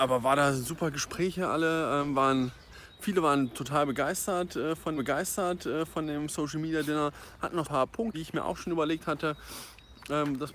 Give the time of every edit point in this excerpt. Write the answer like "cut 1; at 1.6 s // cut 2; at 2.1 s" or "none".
cut 1; at 5.0 s // cut 2; at 7.6 s // cut 3; at 8.1 s